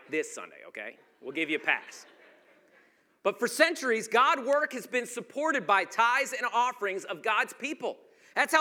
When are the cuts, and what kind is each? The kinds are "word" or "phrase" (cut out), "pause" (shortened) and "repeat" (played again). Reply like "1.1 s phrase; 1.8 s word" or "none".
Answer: none